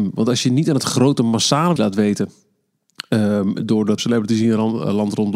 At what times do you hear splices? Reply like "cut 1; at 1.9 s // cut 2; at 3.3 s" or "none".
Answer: cut 1; at 1.8 s // cut 2; at 4.0 s

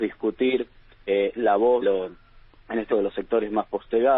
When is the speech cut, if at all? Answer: cut 1; at 1.8 s // cut 2; at 2.9 s

